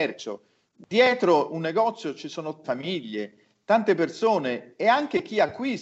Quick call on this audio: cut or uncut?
cut